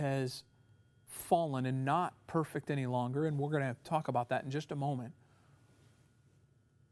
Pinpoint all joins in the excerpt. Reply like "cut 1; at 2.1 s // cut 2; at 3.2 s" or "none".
none